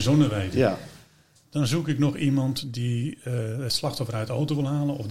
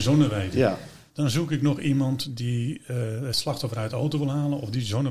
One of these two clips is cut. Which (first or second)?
second